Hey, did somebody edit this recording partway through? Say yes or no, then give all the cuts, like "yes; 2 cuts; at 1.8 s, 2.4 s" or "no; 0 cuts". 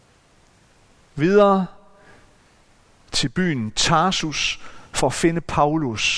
no; 0 cuts